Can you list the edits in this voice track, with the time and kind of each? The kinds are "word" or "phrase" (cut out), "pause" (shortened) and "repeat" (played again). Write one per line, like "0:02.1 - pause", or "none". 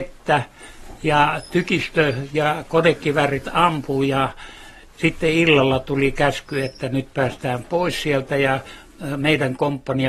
none